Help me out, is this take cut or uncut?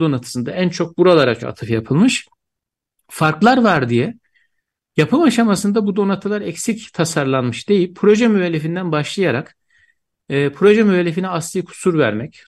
cut